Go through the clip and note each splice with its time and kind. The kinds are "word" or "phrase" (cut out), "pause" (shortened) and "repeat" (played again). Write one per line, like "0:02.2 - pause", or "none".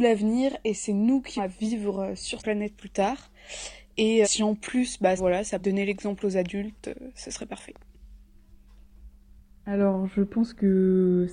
0:01.4 - word
0:02.4 - word
0:04.2 - word
0:05.2 - word
0:05.6 - word